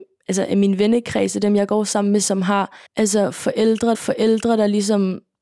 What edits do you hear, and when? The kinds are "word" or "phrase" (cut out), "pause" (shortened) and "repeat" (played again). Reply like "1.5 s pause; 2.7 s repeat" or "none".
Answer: 2.9 s pause; 3.9 s repeat